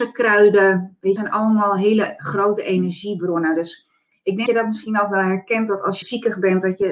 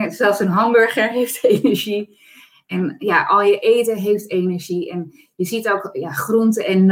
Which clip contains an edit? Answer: first; 3 cuts; at 1.2 s, 4.5 s, 6.0 s

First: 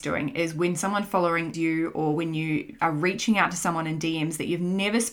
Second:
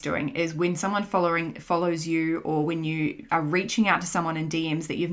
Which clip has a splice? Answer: first; 1 cut; at 1.5 s

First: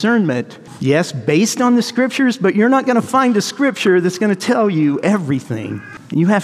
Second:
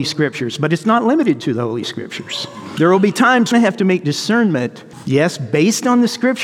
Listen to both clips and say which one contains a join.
second; 1 cut; at 3.5 s

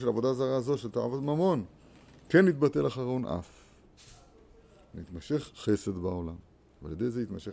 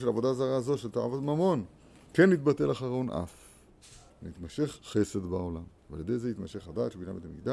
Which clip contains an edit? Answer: second; 3 cuts; at 2.1 s, 4.1 s, 5.8 s

